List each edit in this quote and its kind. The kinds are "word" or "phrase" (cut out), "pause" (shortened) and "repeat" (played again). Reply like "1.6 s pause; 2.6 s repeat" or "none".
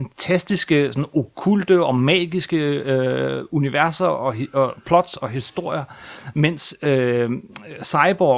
none